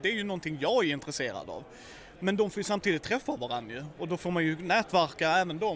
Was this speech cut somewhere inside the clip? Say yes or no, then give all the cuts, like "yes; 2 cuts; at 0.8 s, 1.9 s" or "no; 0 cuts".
no; 0 cuts